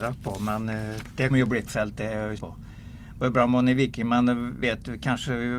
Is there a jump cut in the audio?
yes; 4 cuts; at 1.3 s, 1.7 s, 2.4 s, 4.6 s

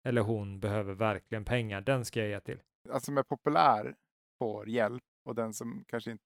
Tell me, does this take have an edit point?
yes; 2 cuts; at 3.0 s, 5.1 s

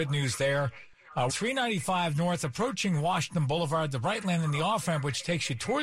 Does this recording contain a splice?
yes; 1 cut; at 1.3 s

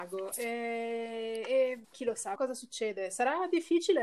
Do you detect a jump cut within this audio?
yes; 2 cuts; at 1.8 s, 2.3 s

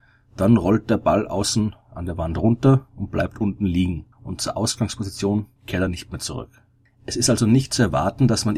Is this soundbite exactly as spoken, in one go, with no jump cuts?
no; 3 cuts; at 4.1 s, 5.6 s, 6.9 s

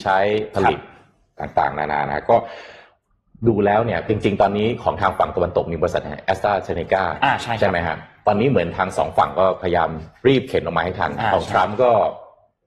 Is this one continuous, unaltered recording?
yes; 0 cuts

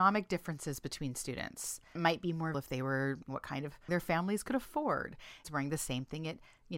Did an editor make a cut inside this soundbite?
yes; 5 cuts; at 2.0 s, 2.5 s, 3.3 s, 3.9 s, 5.4 s

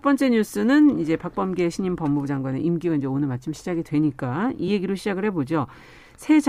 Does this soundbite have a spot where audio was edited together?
no; 0 cuts

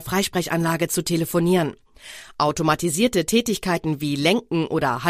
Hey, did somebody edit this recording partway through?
no; 0 cuts

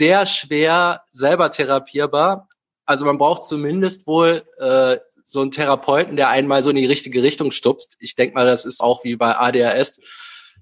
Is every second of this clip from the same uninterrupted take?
no; 1 cut; at 8.8 s

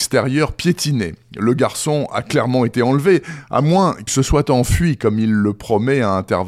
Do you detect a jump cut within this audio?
yes; 1 cut; at 4.1 s

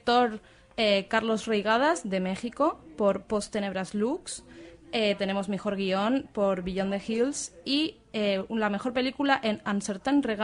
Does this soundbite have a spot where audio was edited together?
no; 0 cuts

